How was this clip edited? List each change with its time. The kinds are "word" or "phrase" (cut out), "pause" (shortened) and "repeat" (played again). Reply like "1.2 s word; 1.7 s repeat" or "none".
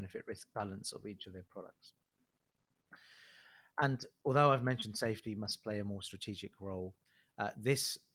none